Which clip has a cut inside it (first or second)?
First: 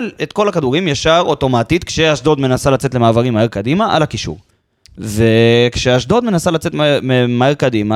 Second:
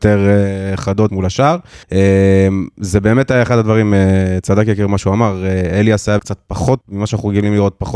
second